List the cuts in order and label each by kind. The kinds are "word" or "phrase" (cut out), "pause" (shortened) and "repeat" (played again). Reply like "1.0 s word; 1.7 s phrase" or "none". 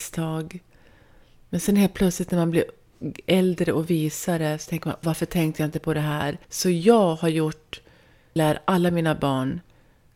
5.0 s word; 6.4 s pause; 8.4 s phrase